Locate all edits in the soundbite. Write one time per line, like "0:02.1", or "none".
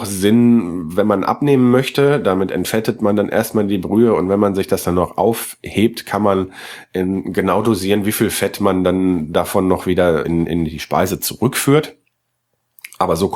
0:10.2